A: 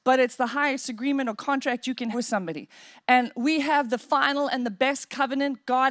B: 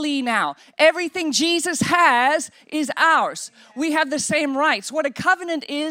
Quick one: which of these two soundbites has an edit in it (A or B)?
A